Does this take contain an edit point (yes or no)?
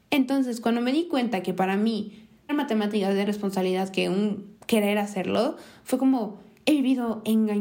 yes